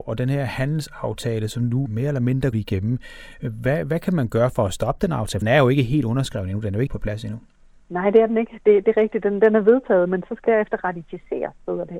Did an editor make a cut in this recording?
yes; 6 cuts; at 1.9 s, 2.5 s, 5.4 s, 6.9 s, 8.8 s, 10.5 s

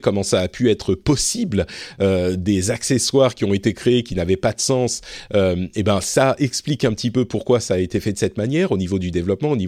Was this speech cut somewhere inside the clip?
no; 0 cuts

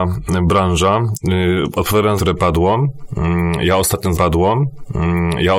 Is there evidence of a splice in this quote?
yes; 2 cuts; at 2.2 s, 4.1 s

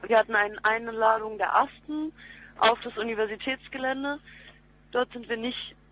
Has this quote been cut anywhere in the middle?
no; 0 cuts

